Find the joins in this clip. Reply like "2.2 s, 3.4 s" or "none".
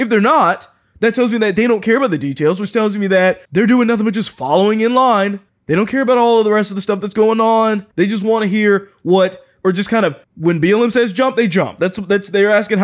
3.4 s, 5.5 s, 7.9 s, 10.2 s